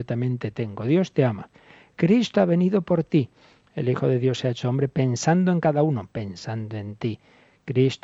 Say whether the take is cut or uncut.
uncut